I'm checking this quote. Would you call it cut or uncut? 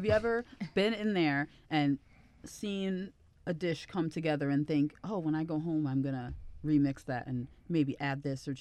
uncut